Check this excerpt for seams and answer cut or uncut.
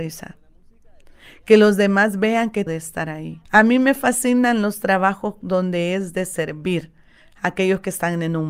cut